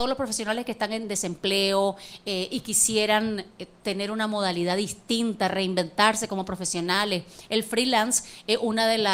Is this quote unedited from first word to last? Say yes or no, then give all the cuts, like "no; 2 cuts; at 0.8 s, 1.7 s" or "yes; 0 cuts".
yes; 0 cuts